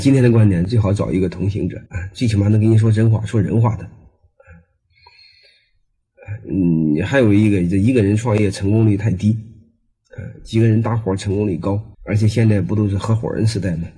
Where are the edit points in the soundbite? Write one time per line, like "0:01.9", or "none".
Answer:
0:01.9
0:11.9